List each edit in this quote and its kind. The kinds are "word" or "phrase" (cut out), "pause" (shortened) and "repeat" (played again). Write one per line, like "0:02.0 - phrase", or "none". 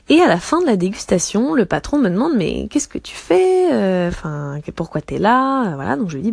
none